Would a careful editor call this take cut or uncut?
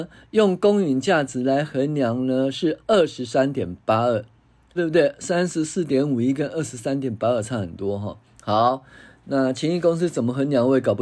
cut